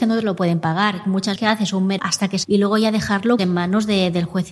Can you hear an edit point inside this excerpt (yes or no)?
yes